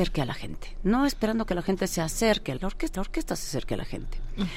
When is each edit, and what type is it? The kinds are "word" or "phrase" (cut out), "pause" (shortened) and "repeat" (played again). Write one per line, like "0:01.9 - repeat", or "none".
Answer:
0:02.6 - phrase
0:02.9 - repeat